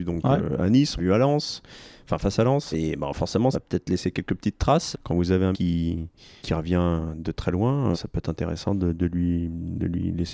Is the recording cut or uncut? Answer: cut